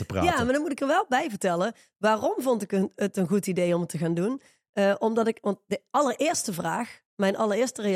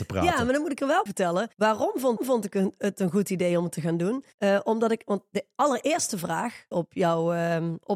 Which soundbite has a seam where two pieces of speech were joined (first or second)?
second